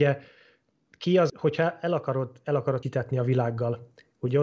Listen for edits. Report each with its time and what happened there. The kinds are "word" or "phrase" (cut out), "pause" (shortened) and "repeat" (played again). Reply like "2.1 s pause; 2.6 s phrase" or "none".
1.3 s word; 2.8 s phrase